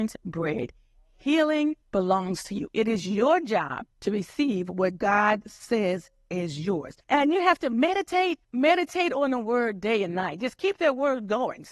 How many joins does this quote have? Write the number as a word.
four